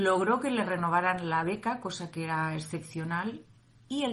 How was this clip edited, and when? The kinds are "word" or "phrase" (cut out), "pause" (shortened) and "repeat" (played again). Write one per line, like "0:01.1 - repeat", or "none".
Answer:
none